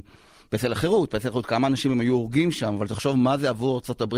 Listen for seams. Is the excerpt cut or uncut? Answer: uncut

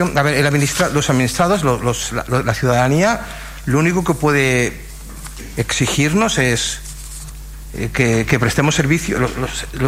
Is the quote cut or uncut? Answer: uncut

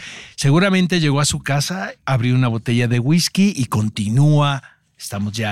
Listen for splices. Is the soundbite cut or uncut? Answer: uncut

